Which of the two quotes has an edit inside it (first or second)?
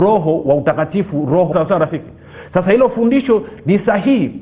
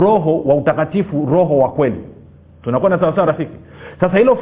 first